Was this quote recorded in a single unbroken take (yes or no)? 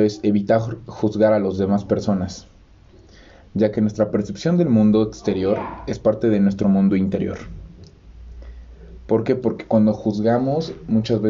yes